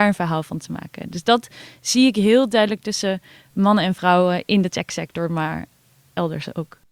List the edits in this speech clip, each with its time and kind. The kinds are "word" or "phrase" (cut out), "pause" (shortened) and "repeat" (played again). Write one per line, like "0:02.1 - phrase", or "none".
none